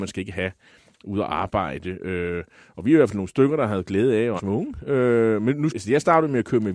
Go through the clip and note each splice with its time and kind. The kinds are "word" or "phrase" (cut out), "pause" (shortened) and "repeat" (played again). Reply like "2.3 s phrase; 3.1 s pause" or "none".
4.4 s word; 5.7 s word

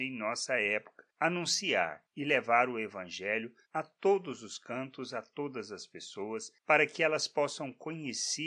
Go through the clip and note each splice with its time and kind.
3.6 s pause

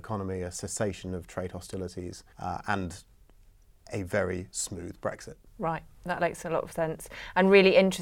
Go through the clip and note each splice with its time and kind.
2.3 s pause

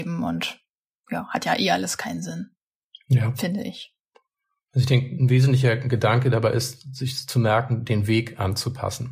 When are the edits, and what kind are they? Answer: none

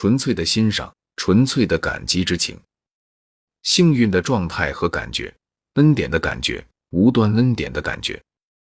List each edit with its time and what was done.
none

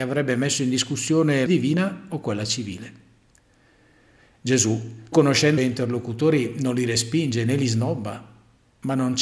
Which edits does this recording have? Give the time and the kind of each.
1.5 s phrase; 5.1 s word; 5.6 s phrase

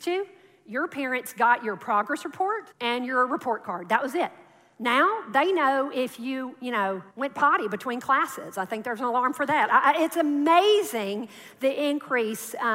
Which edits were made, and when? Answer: 2.7 s pause; 7.1 s pause

